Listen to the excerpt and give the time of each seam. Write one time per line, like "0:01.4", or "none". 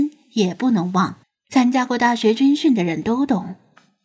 0:01.2